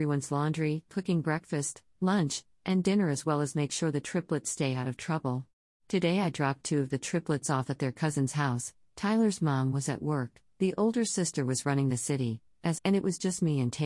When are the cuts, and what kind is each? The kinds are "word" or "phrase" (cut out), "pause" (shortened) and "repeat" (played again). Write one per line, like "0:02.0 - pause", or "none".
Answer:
0:05.7 - pause
0:12.8 - word